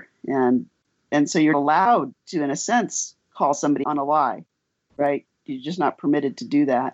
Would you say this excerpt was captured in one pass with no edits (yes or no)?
no